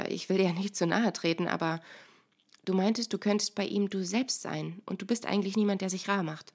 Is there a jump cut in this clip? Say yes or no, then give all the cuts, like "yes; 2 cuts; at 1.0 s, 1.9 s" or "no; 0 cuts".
no; 0 cuts